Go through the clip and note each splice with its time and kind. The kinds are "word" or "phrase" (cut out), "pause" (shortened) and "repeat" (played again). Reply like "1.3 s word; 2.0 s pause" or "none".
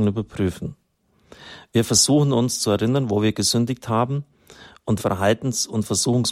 5.0 s word